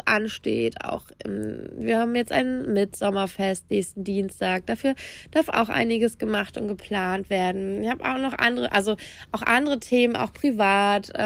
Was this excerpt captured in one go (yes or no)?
yes